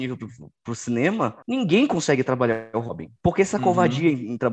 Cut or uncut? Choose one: cut